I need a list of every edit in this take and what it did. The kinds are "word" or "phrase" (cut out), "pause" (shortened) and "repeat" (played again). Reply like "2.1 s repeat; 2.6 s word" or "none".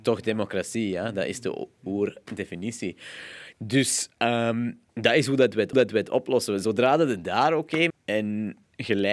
4.9 s pause; 5.7 s repeat; 7.9 s word